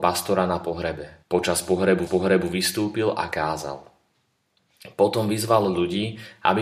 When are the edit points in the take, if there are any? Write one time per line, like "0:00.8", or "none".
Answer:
0:01.2
0:02.1